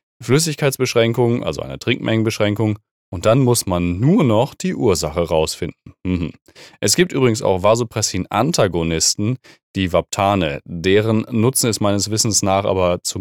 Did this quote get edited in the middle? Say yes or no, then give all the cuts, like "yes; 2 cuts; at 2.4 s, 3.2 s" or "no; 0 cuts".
no; 0 cuts